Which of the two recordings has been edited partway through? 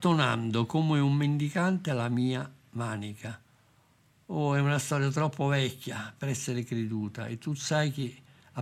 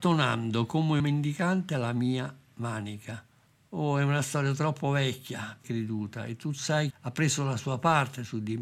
second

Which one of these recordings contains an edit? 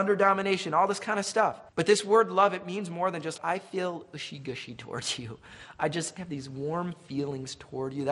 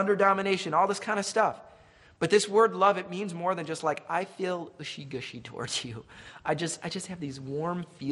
first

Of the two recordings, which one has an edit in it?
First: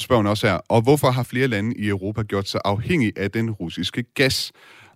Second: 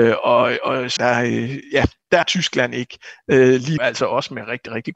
second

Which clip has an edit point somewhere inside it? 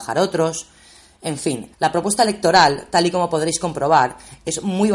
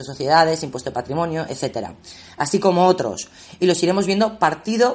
first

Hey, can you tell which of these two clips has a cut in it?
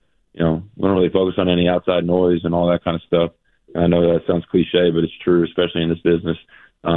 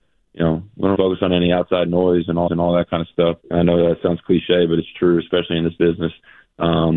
second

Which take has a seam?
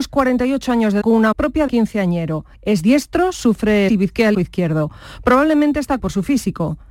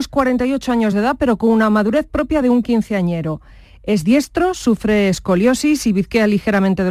first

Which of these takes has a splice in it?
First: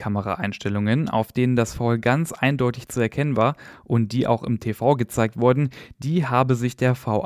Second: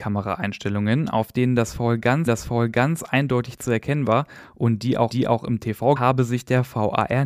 second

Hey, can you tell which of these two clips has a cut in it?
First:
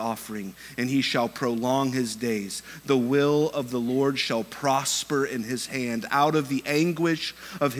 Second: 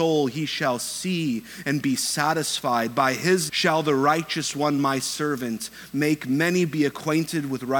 second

